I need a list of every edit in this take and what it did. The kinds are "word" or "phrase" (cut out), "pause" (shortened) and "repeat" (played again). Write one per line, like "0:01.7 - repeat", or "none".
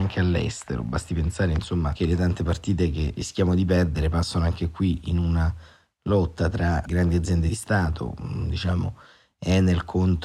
none